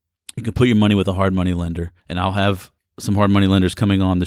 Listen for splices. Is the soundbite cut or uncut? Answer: cut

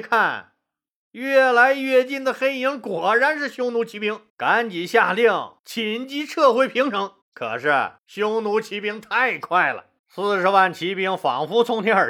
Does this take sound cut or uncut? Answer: cut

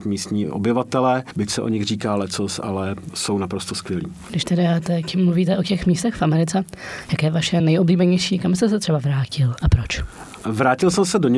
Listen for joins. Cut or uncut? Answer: uncut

